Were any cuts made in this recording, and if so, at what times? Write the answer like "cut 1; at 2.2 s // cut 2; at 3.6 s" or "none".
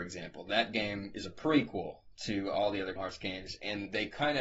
cut 1; at 3.0 s